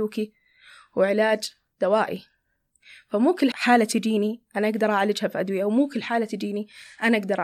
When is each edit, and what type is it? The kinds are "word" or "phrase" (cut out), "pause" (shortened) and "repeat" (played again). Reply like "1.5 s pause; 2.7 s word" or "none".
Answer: 3.5 s word